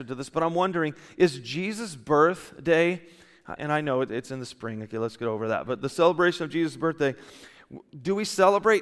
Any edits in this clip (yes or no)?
yes